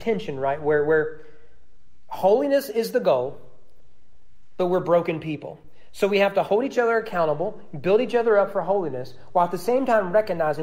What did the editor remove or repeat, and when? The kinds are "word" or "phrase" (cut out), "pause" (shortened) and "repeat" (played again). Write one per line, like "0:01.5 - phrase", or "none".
none